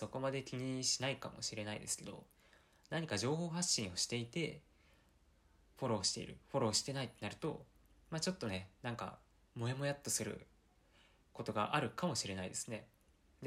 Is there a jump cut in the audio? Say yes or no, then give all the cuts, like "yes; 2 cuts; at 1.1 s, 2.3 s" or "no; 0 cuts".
no; 0 cuts